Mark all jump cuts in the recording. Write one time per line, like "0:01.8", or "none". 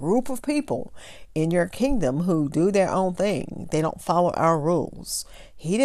none